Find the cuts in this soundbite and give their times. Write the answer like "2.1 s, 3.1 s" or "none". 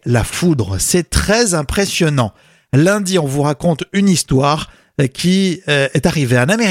none